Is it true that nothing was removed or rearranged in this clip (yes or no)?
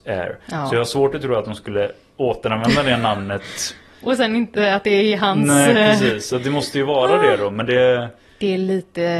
yes